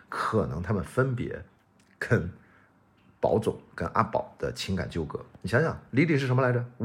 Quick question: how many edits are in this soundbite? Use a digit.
0